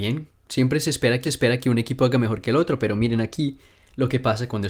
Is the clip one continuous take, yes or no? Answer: no